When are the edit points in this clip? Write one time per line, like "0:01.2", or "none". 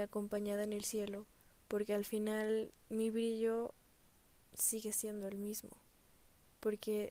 none